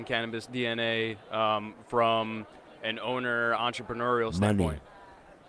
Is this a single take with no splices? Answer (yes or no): no